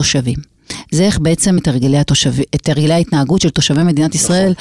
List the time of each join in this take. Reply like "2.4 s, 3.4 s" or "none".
1.6 s